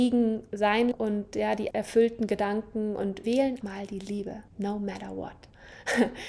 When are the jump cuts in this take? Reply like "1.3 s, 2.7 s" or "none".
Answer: 0.9 s, 1.7 s, 3.2 s, 3.6 s, 4.5 s